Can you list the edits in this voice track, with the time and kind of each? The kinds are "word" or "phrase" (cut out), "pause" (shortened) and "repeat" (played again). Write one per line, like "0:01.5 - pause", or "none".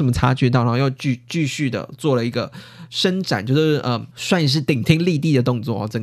0:04.1 - pause